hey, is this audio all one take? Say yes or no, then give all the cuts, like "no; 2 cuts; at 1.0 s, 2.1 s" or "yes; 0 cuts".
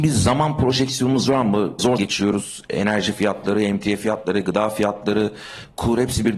no; 1 cut; at 2.0 s